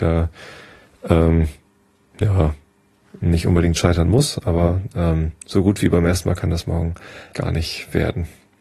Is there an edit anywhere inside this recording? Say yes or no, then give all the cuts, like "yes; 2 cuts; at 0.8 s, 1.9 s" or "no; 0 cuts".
yes; 1 cut; at 7.3 s